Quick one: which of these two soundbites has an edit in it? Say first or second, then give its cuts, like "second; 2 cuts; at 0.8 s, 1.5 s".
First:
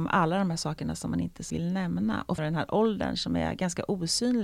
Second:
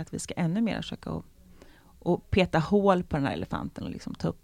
first; 2 cuts; at 1.5 s, 2.4 s